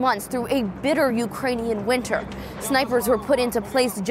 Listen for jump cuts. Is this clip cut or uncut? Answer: uncut